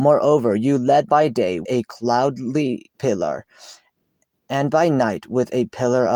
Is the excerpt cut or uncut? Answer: cut